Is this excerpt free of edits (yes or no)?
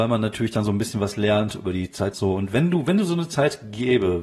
no